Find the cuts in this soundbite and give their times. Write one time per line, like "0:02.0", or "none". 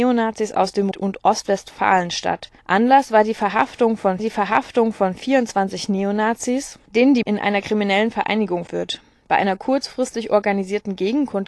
0:00.9
0:02.6
0:04.2
0:07.2
0:08.7